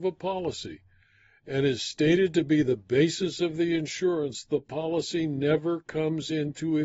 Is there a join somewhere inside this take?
no; 0 cuts

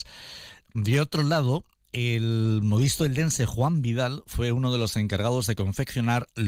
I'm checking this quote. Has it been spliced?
no; 0 cuts

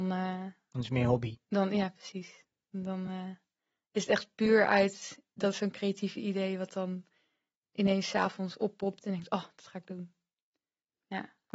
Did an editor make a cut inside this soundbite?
no; 0 cuts

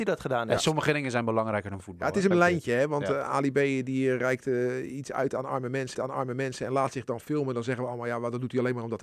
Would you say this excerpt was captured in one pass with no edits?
no; 2 cuts; at 2.3 s, 5.9 s

